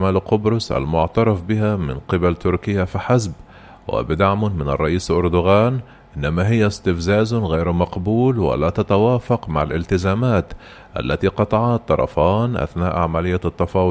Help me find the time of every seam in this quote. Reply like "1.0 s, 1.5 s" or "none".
none